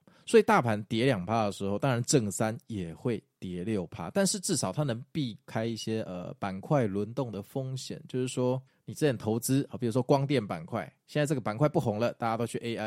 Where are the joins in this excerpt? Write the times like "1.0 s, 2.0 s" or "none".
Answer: 8.7 s